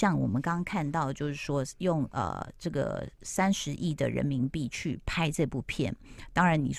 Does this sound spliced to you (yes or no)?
yes